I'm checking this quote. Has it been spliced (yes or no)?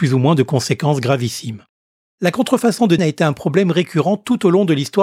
yes